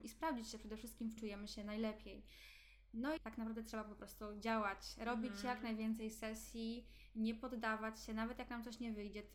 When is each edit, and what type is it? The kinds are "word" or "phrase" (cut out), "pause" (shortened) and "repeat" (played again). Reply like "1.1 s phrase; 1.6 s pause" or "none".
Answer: 1.2 s word; 3.2 s word

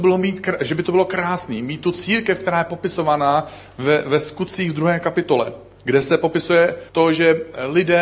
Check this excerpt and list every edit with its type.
6.9 s pause

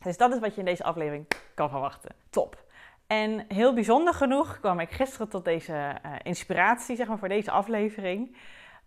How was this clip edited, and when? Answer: 2.2 s pause

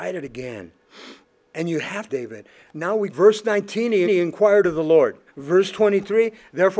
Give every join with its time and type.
1.2 s pause; 2.1 s phrase; 3.1 s phrase; 4.0 s repeat; 5.3 s pause

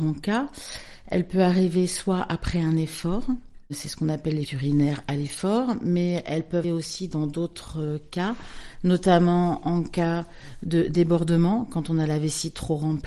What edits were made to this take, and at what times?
4.4 s word; 6.6 s word

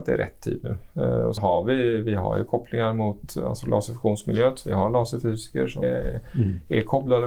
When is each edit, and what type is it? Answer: 1.4 s word; 5.8 s word

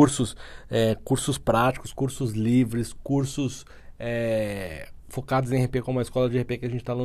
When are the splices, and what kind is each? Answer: none

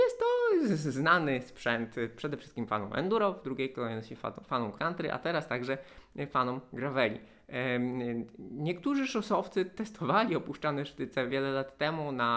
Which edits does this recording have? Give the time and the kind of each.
4.8 s word; 11.3 s word

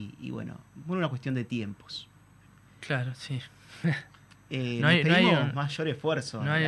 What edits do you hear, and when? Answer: none

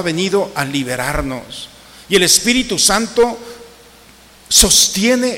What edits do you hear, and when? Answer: none

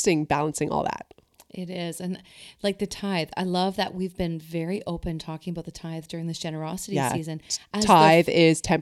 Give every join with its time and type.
none

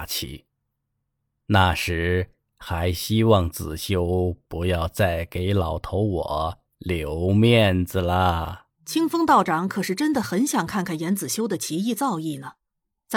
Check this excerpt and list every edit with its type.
8.7 s pause

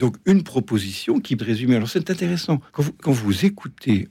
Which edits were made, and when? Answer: 1.4 s word; 2.7 s pause; 3.0 s word

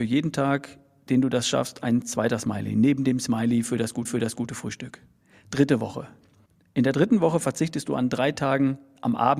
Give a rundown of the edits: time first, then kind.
4.0 s repeat; 6.5 s pause

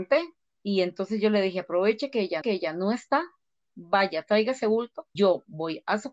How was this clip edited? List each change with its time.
2.4 s repeat; 5.2 s word

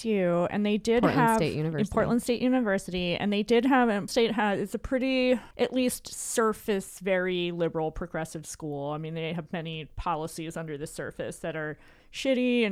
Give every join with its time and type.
4.1 s word; 5.5 s pause

